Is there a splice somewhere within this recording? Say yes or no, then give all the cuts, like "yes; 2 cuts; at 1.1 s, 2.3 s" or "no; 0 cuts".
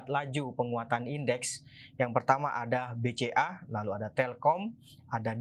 no; 0 cuts